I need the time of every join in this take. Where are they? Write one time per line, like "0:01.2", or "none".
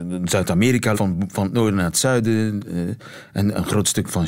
0:00.9